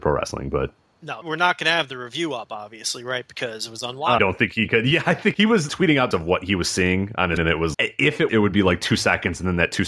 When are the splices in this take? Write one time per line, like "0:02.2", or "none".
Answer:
0:01.2
0:04.2
0:05.3
0:05.7
0:06.1
0:07.4
0:07.7
0:08.3

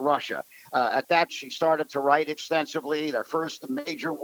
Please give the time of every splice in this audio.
0:01.3

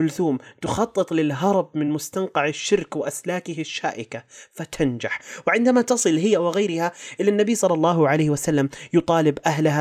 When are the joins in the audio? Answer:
none

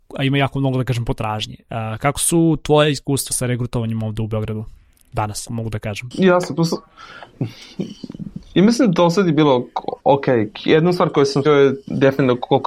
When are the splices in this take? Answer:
0:03.3
0:05.5
0:10.0
0:11.5

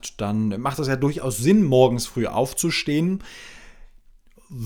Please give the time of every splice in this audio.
none

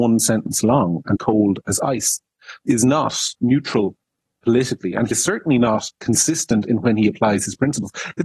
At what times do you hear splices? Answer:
0:01.2
0:02.7
0:03.4
0:05.1

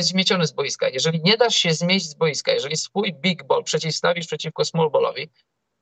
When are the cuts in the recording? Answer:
none

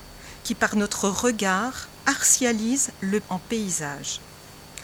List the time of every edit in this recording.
0:03.2

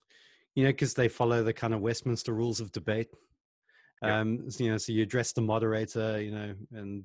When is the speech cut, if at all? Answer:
none

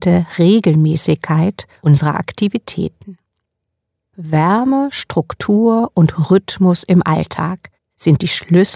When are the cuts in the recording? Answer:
none

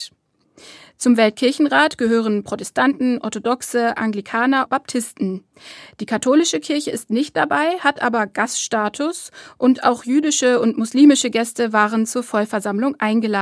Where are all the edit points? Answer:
0:04.7

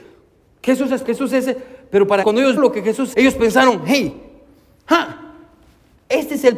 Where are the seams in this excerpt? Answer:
0:01.0
0:02.2
0:02.6
0:03.1

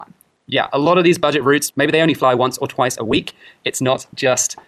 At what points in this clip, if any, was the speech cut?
none

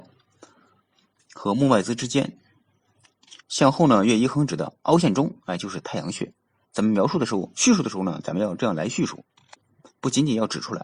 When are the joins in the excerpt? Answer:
none

